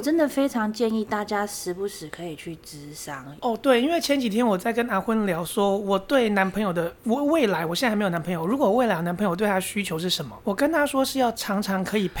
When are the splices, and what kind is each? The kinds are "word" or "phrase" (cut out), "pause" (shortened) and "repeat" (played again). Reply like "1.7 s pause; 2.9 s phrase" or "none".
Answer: 3.4 s pause